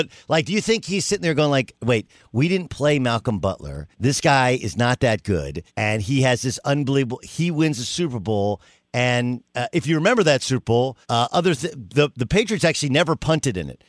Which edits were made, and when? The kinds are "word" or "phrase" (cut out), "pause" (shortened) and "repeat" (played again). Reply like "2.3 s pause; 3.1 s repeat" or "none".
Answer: 3.9 s pause; 5.7 s pause; 9.5 s pause; 11.0 s pause